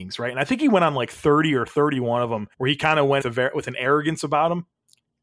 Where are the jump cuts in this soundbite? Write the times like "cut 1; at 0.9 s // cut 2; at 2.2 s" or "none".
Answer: cut 1; at 2.5 s // cut 2; at 3.2 s